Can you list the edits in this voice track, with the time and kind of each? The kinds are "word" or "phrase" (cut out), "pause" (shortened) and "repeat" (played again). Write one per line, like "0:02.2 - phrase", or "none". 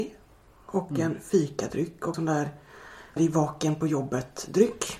0:02.1 - word
0:03.2 - word